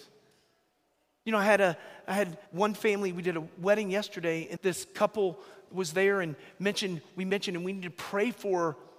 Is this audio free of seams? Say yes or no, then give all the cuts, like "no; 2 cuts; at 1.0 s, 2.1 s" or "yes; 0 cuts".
no; 2 cuts; at 2.5 s, 4.6 s